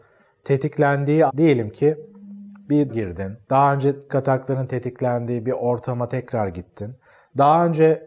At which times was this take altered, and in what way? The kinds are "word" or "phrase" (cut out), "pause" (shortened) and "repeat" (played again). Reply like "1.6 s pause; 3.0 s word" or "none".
1.3 s word; 2.9 s word; 3.4 s pause; 4.1 s word